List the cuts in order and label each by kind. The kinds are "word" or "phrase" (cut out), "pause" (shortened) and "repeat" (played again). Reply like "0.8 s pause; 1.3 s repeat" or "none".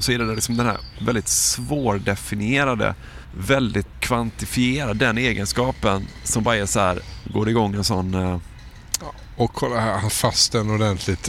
3.9 s phrase; 10.1 s word